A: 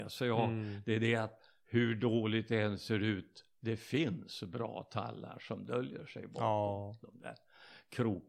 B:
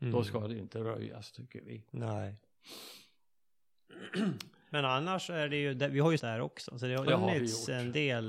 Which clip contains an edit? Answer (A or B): B